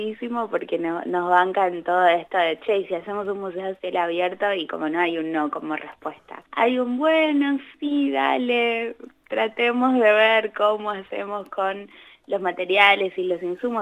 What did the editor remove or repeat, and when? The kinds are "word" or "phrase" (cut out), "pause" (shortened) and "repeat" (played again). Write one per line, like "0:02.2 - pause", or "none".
0:06.5 - pause